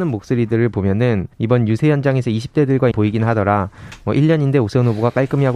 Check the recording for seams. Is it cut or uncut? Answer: cut